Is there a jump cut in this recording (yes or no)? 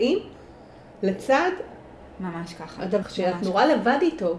yes